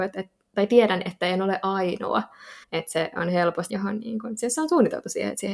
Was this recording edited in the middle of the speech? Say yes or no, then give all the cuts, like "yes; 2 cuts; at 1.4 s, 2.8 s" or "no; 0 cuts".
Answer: yes; 2 cuts; at 2.6 s, 3.7 s